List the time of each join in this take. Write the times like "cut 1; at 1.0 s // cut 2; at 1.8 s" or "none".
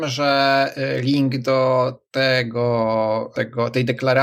none